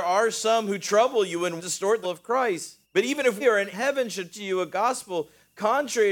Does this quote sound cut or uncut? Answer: cut